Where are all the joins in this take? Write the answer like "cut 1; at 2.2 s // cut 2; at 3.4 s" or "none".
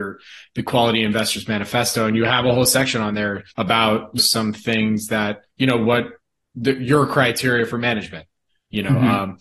cut 1; at 3.5 s // cut 2; at 4.2 s // cut 3; at 5.5 s